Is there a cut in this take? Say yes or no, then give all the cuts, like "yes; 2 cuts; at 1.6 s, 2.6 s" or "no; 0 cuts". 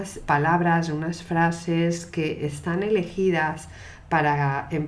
no; 0 cuts